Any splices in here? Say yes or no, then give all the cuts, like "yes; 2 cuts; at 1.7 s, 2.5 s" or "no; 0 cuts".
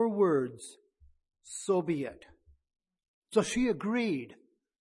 no; 0 cuts